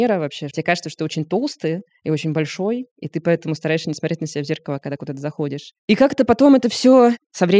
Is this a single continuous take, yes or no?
no